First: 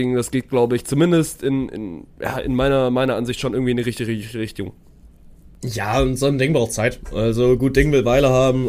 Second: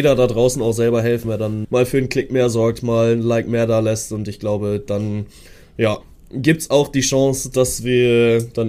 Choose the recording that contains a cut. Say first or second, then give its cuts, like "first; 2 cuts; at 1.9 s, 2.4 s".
second; 2 cuts; at 1.2 s, 1.6 s